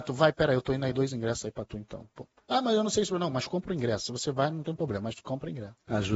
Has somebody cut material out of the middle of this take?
yes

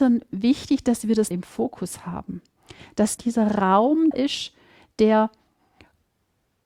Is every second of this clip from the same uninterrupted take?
no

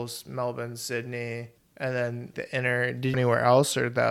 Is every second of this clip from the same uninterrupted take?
no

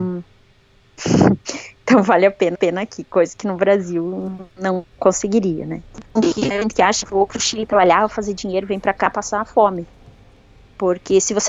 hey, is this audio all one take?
no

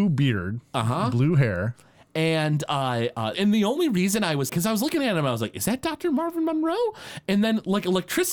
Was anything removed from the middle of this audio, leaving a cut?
yes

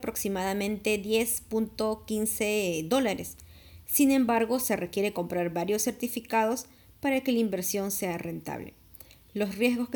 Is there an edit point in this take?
no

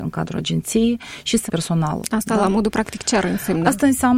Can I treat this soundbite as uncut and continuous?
no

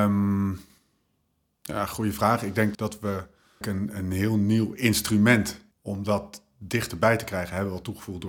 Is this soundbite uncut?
no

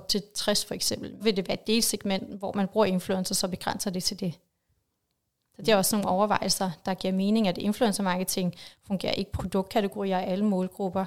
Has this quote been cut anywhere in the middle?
yes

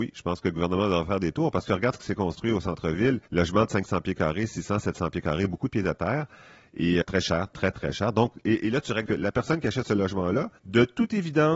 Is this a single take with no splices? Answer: no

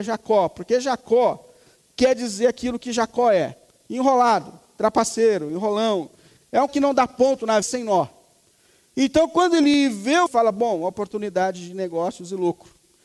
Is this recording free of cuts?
no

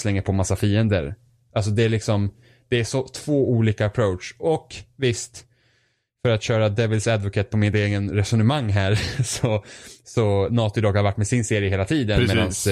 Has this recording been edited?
no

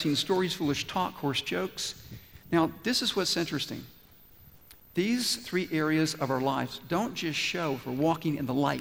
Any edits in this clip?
yes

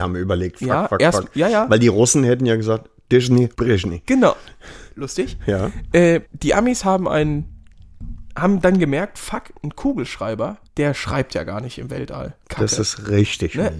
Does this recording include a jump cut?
yes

